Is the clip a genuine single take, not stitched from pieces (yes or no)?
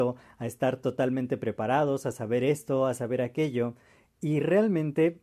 yes